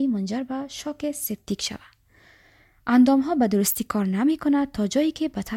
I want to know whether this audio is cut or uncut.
uncut